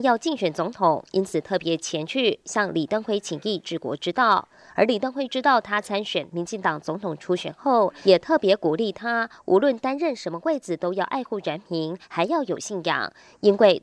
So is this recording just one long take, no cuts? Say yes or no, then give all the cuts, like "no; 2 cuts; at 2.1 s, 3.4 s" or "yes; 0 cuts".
yes; 0 cuts